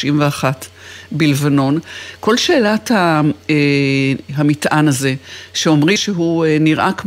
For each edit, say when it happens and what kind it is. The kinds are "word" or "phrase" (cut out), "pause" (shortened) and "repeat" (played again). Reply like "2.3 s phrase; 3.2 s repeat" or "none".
4.3 s word; 6.0 s word